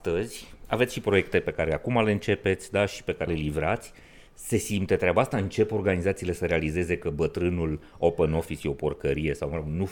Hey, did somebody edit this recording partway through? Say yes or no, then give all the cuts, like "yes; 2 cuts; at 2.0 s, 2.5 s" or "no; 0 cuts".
yes; 1 cut; at 3.3 s